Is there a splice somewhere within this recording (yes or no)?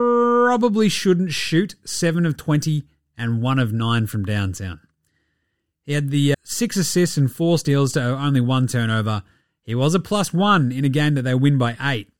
yes